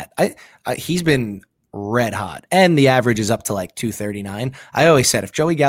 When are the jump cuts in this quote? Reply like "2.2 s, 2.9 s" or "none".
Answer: none